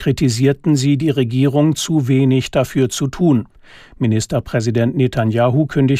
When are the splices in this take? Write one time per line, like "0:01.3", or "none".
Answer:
none